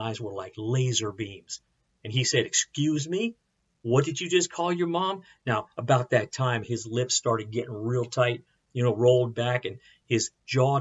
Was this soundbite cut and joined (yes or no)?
no